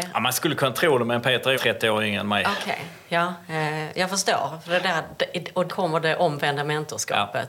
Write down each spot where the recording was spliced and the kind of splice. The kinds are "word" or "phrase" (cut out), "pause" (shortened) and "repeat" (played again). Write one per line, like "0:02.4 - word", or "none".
0:01.5 - word
0:05.7 - word